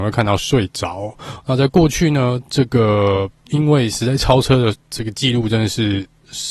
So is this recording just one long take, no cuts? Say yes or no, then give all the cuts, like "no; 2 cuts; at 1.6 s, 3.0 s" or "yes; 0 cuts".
no; 1 cut; at 4.8 s